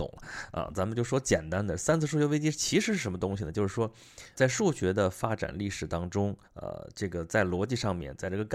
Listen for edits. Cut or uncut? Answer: cut